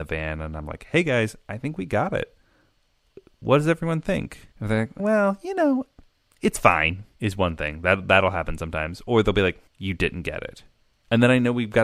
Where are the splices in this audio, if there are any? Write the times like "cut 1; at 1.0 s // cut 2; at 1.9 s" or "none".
cut 1; at 4.5 s // cut 2; at 5.0 s

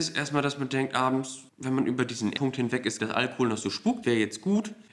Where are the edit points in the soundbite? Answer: cut 1; at 2.3 s // cut 2; at 3.0 s // cut 3; at 4.0 s

